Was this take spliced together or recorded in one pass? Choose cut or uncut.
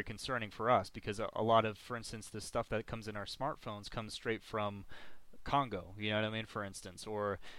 uncut